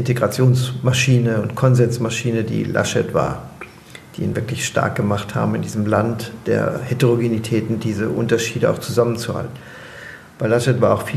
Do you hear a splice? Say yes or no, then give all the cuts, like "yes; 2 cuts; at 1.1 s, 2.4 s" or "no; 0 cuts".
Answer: no; 0 cuts